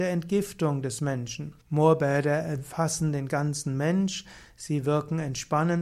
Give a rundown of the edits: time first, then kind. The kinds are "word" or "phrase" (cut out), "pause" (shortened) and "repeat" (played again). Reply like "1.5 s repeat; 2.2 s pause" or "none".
1.6 s pause

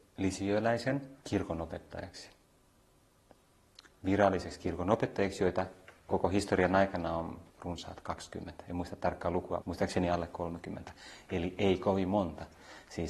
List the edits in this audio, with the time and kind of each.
1.2 s pause; 6.1 s word; 7.5 s pause; 9.6 s word

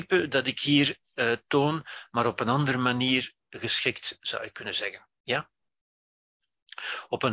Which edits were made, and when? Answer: none

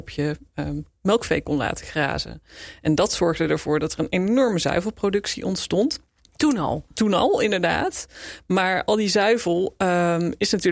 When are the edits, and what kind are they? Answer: none

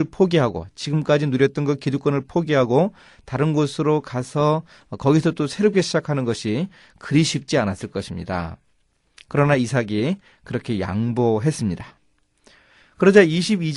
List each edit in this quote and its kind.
none

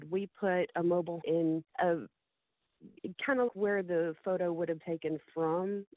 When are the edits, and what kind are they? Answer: 1.2 s word; 1.7 s pause; 3.5 s word; 4.8 s word

